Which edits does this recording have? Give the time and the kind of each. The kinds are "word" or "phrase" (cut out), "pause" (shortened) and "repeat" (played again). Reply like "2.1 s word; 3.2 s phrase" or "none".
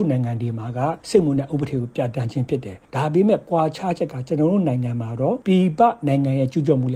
1.0 s pause

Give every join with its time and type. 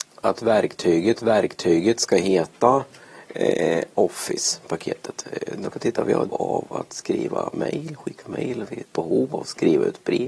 1.2 s repeat; 5.7 s word; 6.3 s word; 8.8 s word

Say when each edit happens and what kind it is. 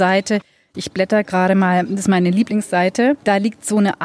none

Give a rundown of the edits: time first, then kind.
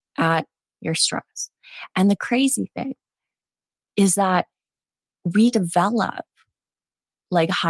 5.5 s word

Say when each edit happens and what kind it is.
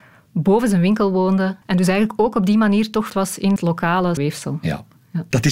1.6 s pause; 3.1 s word; 3.6 s word; 4.2 s word

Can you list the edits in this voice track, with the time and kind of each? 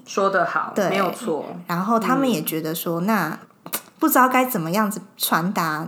none

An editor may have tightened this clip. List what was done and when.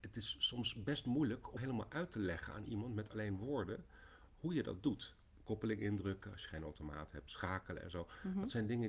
1.6 s word

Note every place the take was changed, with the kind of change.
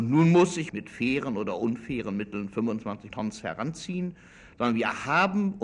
3.1 s word

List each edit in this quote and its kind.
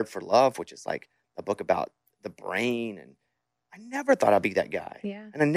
none

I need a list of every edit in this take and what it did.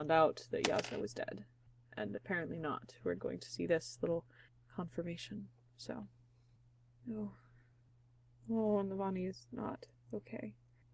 3.2 s word

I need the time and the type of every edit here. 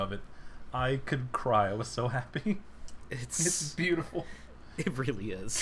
none

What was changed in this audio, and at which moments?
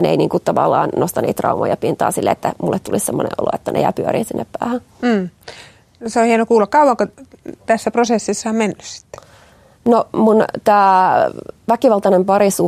none

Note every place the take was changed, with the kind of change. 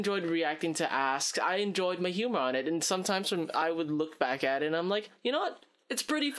none

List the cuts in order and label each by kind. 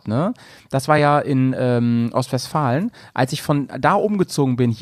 none

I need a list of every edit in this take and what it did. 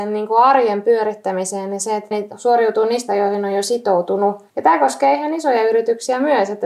2.1 s word; 3.1 s word; 4.5 s pause

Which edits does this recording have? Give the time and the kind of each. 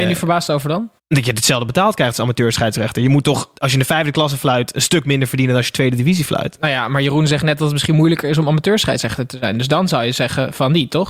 1.0 s pause; 3.6 s pause

